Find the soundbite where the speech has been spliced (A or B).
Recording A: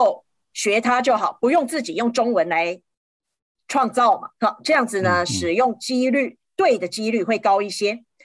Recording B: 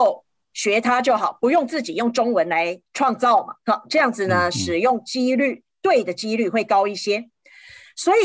B